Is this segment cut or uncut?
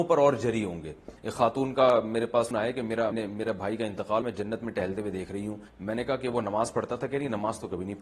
cut